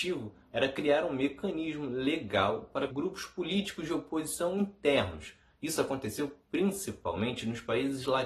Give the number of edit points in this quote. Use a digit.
1